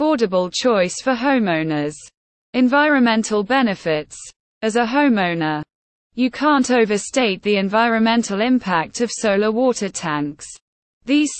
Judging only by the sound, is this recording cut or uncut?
uncut